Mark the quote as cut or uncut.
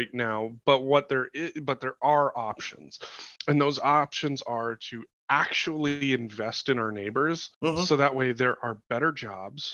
cut